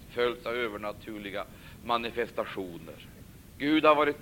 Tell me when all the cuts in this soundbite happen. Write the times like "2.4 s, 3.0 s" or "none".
3.2 s